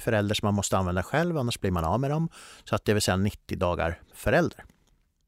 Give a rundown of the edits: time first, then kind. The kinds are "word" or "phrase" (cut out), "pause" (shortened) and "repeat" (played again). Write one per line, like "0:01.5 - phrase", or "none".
0:04.1 - word